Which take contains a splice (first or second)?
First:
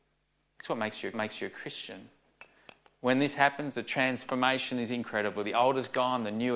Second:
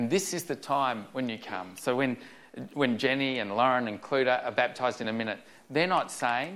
first